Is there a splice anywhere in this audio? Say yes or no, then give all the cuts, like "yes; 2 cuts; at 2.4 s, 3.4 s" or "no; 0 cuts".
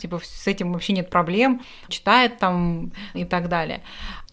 yes; 2 cuts; at 1.9 s, 3.1 s